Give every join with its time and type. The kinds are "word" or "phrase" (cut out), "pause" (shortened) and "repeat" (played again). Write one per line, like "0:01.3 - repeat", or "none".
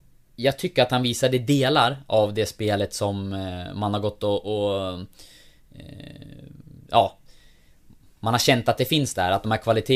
none